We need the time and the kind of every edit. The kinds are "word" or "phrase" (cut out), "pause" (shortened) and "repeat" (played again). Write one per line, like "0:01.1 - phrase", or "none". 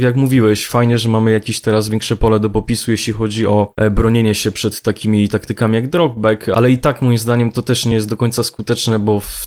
none